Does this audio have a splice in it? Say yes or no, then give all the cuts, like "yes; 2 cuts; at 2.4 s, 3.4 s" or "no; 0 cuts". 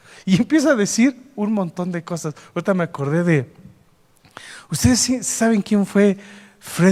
no; 0 cuts